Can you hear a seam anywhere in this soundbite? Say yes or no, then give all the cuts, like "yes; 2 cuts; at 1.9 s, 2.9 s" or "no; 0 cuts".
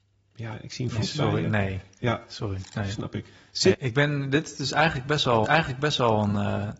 yes; 3 cuts; at 1.0 s, 3.7 s, 5.4 s